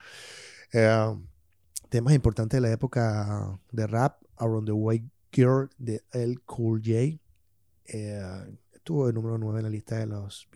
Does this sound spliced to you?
no; 0 cuts

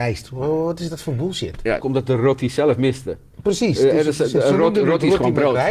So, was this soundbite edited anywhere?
yes; 1 cut; at 1.8 s

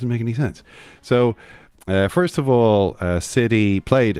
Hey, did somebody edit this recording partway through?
no; 0 cuts

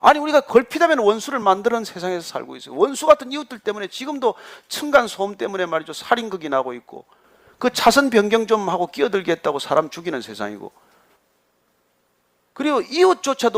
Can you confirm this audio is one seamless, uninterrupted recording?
yes; 0 cuts

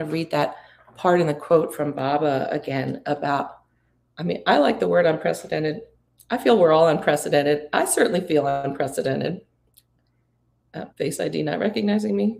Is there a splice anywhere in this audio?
yes; 1 cut; at 10.9 s

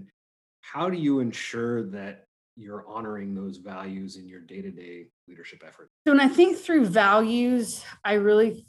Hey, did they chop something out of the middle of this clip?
no; 0 cuts

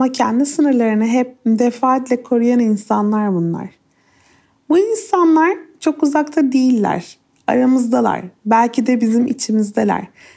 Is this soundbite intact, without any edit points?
yes; 0 cuts

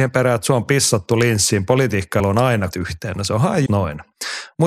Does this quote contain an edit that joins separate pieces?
yes; 3 cuts; at 2.2 s, 2.7 s, 3.7 s

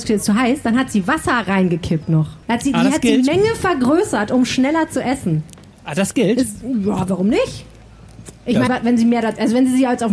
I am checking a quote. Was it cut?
yes; 2 cuts; at 2.4 s, 8.7 s

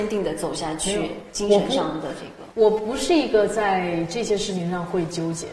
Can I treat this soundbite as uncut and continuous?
no; 1 cut; at 2.5 s

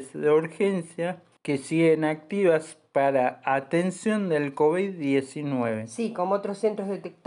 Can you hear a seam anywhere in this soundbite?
no; 0 cuts

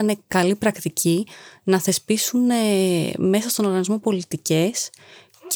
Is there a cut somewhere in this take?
no; 0 cuts

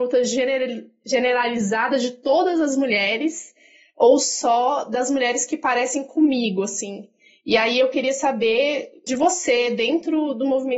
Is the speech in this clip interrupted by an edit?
no; 0 cuts

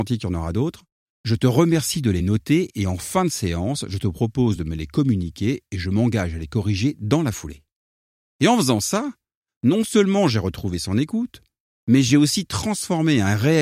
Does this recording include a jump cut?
no; 0 cuts

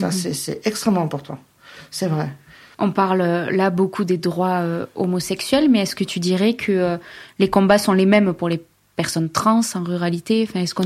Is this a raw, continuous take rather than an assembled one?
yes; 0 cuts

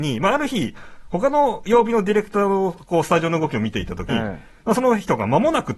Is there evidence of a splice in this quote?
yes; 1 cut; at 4.1 s

